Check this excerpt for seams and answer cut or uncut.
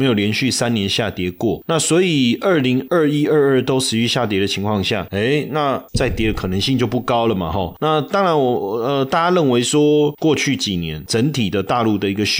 uncut